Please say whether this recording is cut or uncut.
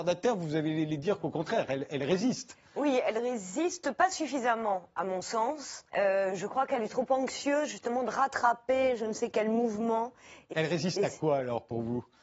cut